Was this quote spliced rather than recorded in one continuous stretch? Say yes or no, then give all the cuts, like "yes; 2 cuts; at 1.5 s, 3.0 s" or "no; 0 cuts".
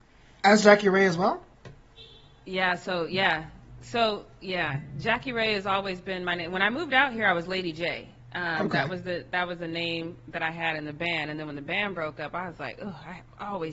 no; 0 cuts